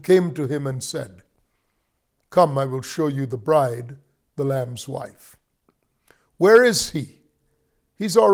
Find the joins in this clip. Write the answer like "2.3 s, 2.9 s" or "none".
none